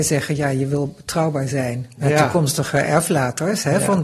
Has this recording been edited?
no; 0 cuts

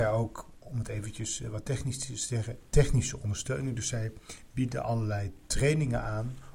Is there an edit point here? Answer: no; 0 cuts

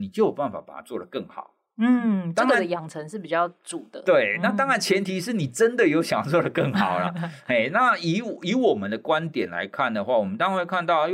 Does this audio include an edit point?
no; 0 cuts

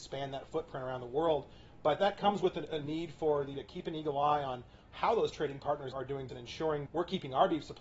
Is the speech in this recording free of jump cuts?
no; 5 cuts; at 2.0 s, 3.5 s, 5.9 s, 6.3 s, 6.9 s

